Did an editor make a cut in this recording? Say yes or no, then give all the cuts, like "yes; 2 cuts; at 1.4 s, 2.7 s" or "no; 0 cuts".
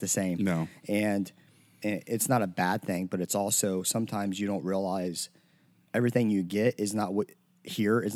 no; 0 cuts